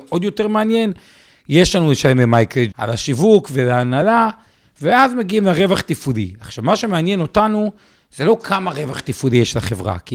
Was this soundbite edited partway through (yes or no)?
yes